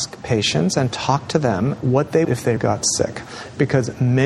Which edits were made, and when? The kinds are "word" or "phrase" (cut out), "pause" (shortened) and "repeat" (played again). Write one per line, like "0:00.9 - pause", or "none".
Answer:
0:01.8 - word
0:02.2 - phrase
0:02.6 - word